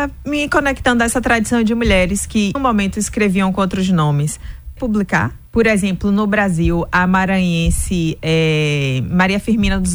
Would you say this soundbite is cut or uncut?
cut